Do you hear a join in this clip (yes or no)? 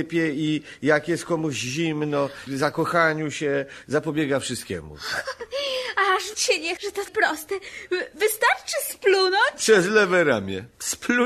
yes